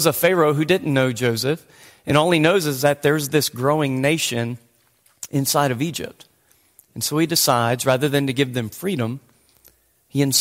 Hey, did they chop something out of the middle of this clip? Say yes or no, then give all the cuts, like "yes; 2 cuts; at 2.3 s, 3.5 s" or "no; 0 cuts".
no; 0 cuts